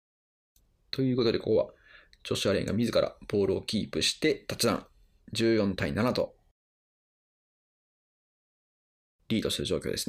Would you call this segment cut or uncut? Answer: uncut